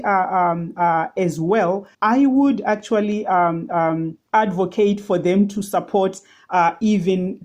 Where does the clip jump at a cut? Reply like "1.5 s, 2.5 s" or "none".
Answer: 1.9 s, 4.3 s